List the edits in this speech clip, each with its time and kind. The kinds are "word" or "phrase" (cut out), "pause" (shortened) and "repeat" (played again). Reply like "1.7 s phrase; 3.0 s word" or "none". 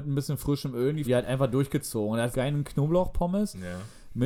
1.0 s phrase; 2.3 s phrase